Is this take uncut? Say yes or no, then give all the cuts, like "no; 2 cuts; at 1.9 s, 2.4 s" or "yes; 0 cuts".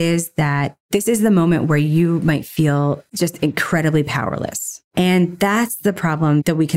yes; 0 cuts